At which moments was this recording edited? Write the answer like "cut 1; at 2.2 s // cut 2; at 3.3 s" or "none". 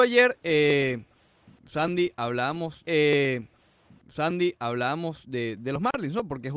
cut 1; at 2.8 s